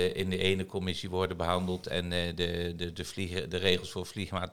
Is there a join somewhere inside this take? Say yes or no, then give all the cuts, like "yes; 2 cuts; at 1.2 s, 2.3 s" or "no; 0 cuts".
no; 0 cuts